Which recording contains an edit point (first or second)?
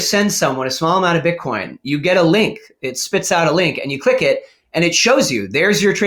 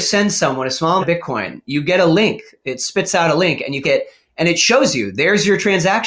second